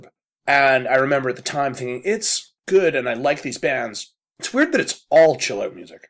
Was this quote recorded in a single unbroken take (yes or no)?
no